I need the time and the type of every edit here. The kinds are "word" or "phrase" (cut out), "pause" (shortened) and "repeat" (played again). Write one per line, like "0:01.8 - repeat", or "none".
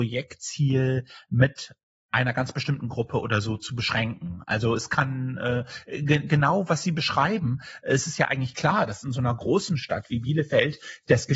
none